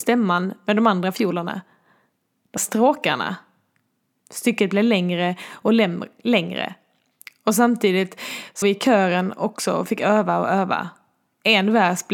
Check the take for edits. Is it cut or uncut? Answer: cut